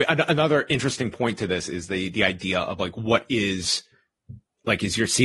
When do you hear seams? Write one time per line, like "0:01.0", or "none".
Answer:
none

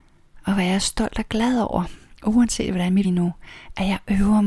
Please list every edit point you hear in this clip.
0:03.0

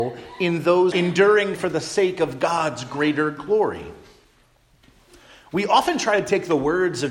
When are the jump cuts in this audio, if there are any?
0:00.9
0:01.5

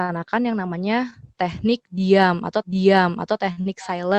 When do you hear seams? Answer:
0:02.6

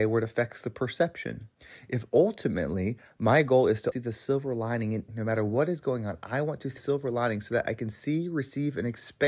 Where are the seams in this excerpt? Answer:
0:03.9
0:05.1
0:06.8

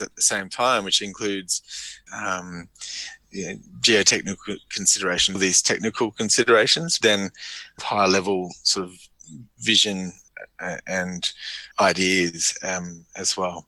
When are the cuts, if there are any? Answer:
0:02.1
0:05.3
0:07.0
0:07.8
0:11.7

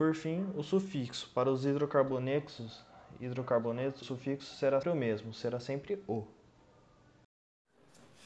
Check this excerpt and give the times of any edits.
0:04.0
0:04.8

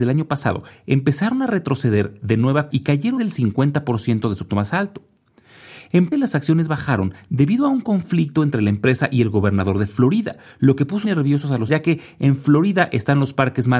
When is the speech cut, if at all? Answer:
0:02.7
0:03.2
0:04.5
0:06.1
0:11.0
0:11.7

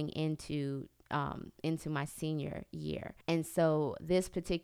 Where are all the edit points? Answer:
0:03.2

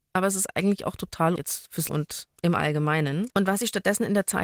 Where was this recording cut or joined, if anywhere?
0:01.4
0:01.9
0:02.4
0:03.3

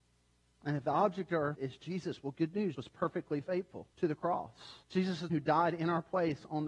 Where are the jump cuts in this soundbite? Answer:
0:01.5
0:02.8
0:03.9
0:04.8
0:05.3

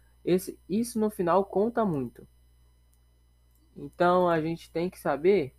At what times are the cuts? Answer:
none

